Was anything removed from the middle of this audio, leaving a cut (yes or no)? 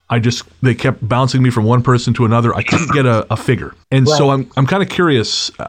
yes